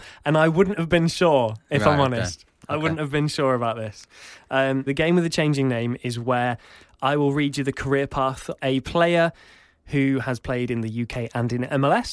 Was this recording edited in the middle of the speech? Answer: yes; 2 cuts; at 4.9 s, 8.6 s

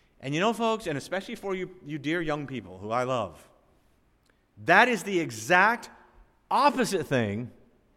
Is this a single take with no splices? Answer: yes; 0 cuts

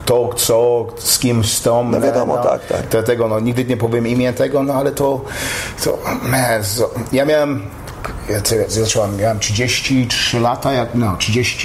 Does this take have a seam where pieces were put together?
no; 0 cuts

